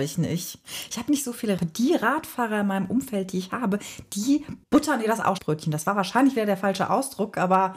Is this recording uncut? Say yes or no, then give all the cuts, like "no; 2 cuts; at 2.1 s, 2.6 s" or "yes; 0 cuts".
no; 3 cuts; at 1.6 s, 4.6 s, 5.4 s